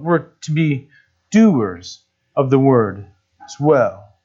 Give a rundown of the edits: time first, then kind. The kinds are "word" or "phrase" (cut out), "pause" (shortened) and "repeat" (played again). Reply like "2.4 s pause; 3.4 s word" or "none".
none